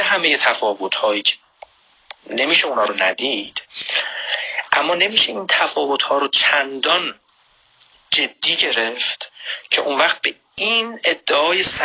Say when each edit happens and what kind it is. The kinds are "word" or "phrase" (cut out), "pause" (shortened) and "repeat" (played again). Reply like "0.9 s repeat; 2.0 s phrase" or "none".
none